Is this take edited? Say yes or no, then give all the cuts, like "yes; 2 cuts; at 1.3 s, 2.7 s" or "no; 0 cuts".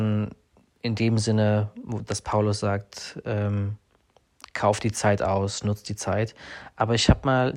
no; 0 cuts